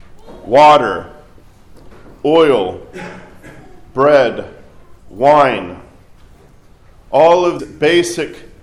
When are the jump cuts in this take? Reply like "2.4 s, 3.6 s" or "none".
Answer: 5.0 s, 7.6 s